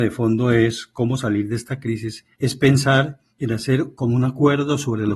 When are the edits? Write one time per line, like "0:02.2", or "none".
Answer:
0:02.3
0:03.3